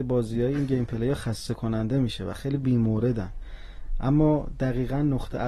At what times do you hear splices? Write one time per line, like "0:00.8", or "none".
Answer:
none